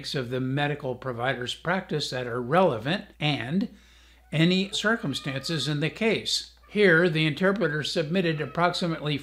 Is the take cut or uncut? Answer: cut